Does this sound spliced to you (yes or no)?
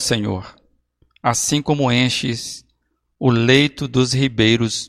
no